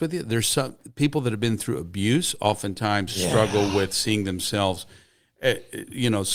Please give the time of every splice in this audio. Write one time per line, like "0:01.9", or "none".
none